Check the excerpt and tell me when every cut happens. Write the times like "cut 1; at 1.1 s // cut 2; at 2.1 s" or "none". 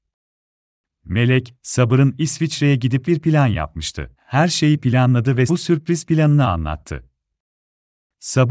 cut 1; at 3.0 s // cut 2; at 4.2 s // cut 3; at 5.5 s